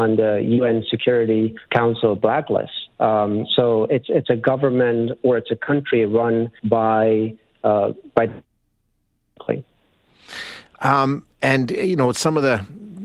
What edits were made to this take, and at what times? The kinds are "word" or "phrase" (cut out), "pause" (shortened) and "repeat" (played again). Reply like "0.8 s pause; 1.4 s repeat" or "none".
1.7 s pause; 2.9 s pause; 6.6 s pause